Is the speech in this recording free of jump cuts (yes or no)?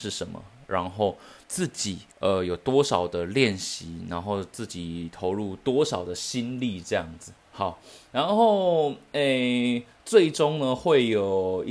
no